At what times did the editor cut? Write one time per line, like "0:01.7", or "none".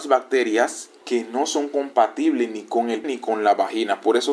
0:03.0

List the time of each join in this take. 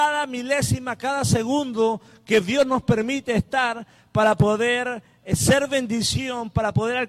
none

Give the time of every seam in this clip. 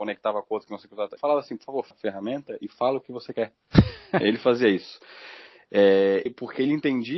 0:01.2
0:01.9
0:04.2
0:06.3

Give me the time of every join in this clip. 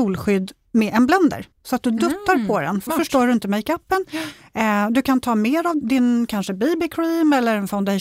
0:01.5
0:02.9
0:05.8

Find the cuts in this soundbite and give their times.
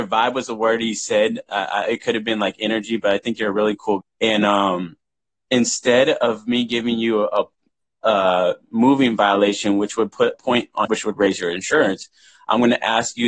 0:04.0
0:10.3
0:10.9

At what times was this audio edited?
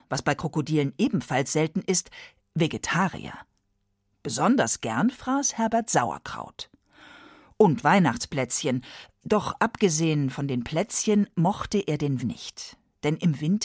0:12.2

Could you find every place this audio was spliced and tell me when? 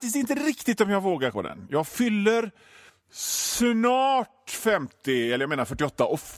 0:01.3
0:02.9

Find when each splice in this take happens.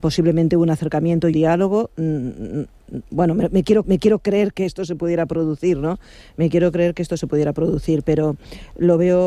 0:01.3
0:03.8

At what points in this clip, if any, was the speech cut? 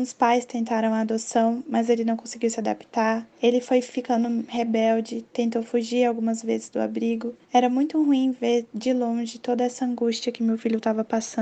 0:03.3
0:07.4

